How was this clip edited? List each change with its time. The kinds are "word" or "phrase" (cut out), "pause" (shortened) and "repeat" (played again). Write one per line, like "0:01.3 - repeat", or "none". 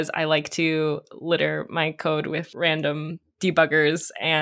none